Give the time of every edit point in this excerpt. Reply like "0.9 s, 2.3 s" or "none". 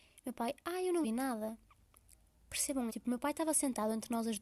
1.0 s, 2.9 s